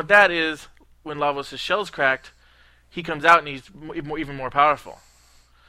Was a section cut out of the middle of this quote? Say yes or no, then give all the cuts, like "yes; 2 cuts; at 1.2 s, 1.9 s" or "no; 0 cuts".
no; 0 cuts